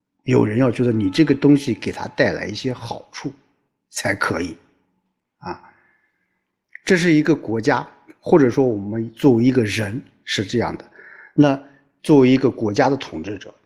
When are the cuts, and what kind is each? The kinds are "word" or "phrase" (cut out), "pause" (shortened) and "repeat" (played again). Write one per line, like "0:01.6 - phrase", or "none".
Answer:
none